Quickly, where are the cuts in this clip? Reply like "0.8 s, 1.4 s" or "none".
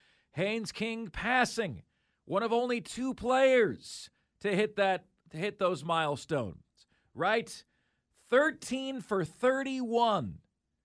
none